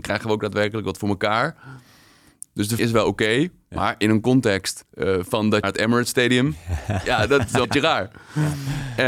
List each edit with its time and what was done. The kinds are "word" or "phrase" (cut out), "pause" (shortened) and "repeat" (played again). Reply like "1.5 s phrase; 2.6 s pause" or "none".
2.8 s word; 4.9 s pause; 5.6 s phrase; 7.6 s word